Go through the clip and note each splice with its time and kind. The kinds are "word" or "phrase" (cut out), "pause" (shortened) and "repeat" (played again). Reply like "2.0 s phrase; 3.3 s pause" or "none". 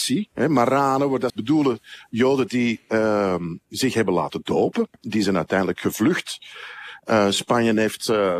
1.3 s word